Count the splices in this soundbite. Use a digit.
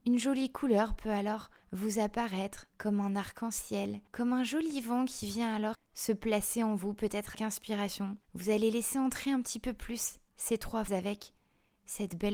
8